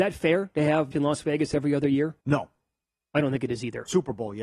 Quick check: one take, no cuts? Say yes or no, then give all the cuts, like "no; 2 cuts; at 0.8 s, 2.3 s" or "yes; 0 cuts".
no; 2 cuts; at 0.9 s, 2.2 s